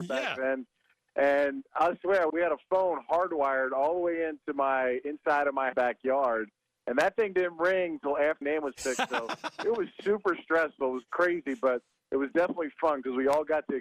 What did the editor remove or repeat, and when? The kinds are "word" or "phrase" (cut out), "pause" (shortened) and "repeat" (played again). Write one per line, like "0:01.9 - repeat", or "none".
0:02.3 - phrase
0:05.7 - phrase
0:08.4 - word